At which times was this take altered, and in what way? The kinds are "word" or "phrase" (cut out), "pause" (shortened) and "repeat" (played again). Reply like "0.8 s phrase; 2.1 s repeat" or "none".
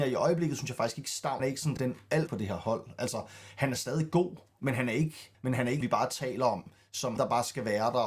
1.4 s word; 1.8 s word; 2.3 s phrase; 5.3 s word; 5.8 s phrase; 7.2 s word